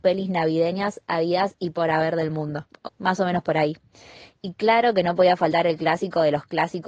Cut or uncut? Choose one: cut